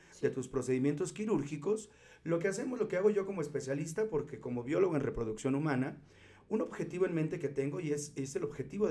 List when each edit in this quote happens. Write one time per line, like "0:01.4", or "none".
none